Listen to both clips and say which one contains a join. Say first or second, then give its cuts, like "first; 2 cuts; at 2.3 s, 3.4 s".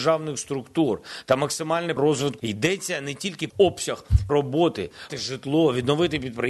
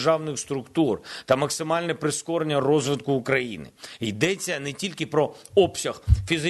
first; 5 cuts; at 2.0 s, 2.4 s, 3.5 s, 4.3 s, 5.1 s